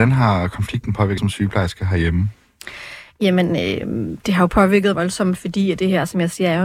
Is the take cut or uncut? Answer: cut